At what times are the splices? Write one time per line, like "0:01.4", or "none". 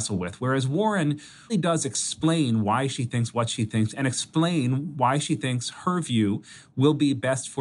0:01.5